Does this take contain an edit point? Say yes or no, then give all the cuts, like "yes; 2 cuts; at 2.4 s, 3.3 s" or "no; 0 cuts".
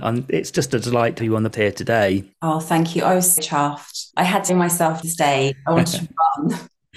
yes; 7 cuts; at 1.2 s, 1.5 s, 2.3 s, 3.4 s, 4.1 s, 4.5 s, 5.0 s